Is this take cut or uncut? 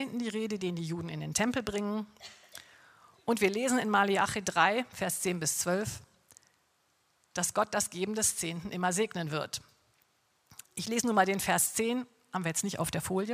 uncut